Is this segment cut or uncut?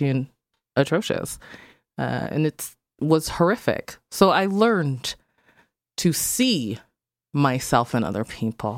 uncut